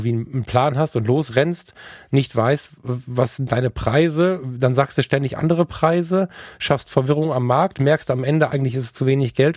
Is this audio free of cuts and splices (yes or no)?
yes